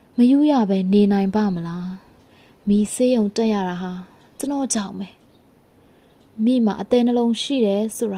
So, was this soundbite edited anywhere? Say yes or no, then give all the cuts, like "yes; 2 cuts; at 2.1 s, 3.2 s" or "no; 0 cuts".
no; 0 cuts